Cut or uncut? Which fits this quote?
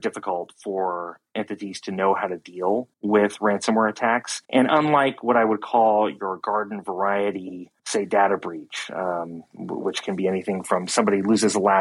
cut